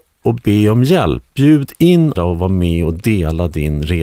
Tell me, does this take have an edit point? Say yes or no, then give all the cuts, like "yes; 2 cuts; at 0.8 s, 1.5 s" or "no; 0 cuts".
yes; 1 cut; at 2.2 s